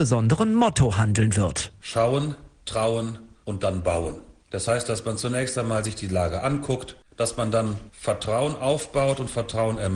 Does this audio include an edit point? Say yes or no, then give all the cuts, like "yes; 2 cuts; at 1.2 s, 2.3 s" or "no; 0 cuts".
no; 0 cuts